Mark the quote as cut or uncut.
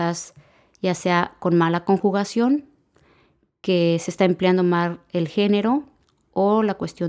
uncut